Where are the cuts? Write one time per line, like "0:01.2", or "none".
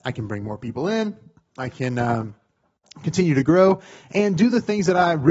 none